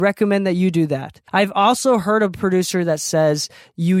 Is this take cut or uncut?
cut